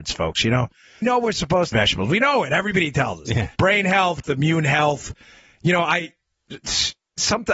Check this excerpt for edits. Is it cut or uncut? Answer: cut